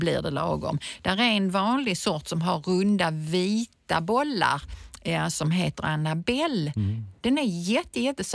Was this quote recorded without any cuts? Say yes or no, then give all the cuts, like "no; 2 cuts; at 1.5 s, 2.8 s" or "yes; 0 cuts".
yes; 0 cuts